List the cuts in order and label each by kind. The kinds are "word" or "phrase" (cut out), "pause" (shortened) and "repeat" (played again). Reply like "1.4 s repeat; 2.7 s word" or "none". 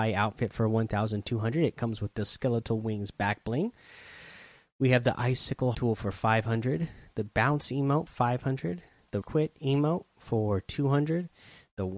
5.7 s word; 7.3 s word; 8.1 s word; 9.2 s word